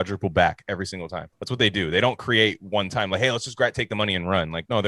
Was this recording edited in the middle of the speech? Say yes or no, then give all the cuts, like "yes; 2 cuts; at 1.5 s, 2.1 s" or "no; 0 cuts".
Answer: yes; 1 cut; at 1.3 s